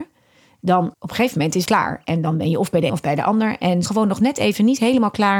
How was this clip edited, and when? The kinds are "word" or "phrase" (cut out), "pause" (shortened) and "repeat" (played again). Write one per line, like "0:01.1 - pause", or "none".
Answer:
0:00.9 - pause
0:01.7 - word
0:02.9 - word
0:03.9 - phrase

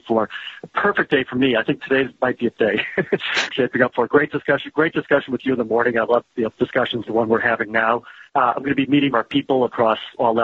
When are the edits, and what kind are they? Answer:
0:02.5 - word
0:03.5 - word
0:06.5 - phrase
0:07.0 - word
0:08.3 - pause
0:09.1 - phrase

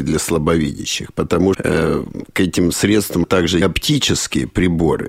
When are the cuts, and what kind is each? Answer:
0:01.5 - word
0:03.2 - word
0:03.6 - word

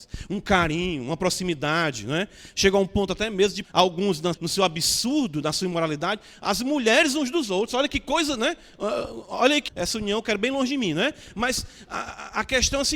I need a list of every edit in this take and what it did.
0:03.6 - word
0:04.3 - word
0:09.7 - word

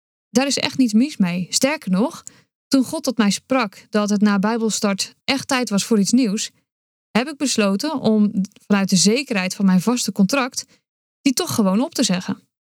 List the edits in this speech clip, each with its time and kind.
none

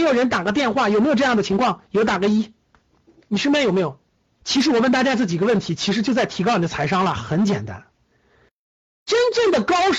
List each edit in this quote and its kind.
none

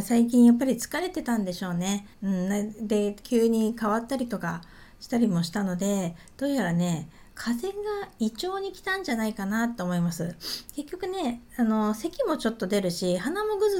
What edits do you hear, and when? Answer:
0:02.1 - pause
0:03.2 - phrase
0:07.3 - pause

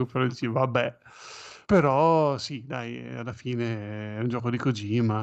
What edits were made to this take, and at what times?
0:01.6 - pause

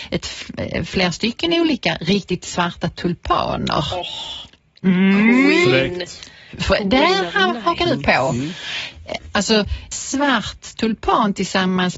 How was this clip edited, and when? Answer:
0:09.9 - word

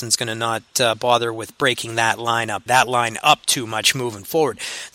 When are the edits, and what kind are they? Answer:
0:02.7 - word

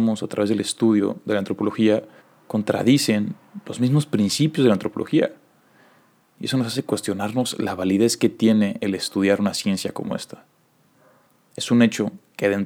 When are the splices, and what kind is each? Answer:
0:02.2 - pause

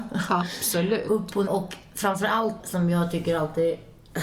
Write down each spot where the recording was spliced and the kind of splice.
0:01.5 - word
0:02.6 - word

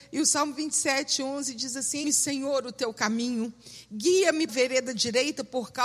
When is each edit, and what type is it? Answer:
0:02.0 - word
0:04.5 - word

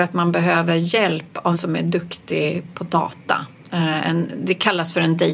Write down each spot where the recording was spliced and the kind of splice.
0:01.5 - word

